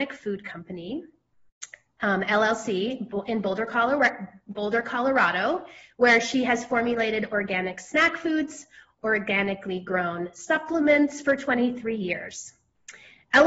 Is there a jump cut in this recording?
no; 0 cuts

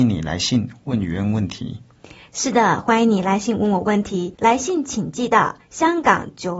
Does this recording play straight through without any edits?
no; 1 cut; at 4.3 s

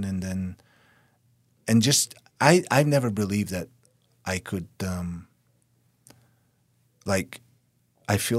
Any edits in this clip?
no; 0 cuts

